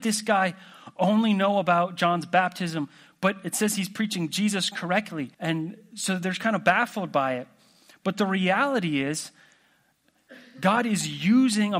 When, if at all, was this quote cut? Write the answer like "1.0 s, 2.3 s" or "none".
5.3 s